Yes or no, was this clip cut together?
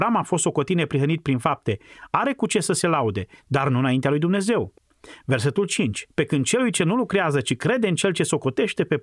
yes